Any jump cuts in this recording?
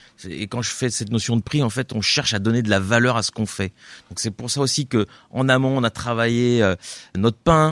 no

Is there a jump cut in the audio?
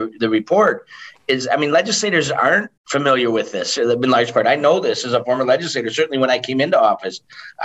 yes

